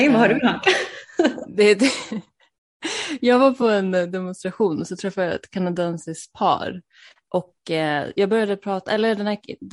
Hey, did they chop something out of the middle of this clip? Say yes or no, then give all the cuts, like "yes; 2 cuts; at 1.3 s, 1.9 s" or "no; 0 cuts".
no; 0 cuts